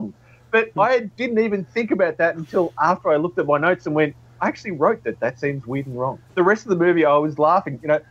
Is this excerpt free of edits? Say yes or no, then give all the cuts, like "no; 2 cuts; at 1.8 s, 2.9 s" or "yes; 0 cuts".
no; 1 cut; at 6.3 s